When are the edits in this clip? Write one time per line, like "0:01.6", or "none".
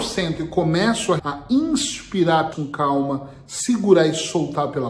0:01.2
0:02.5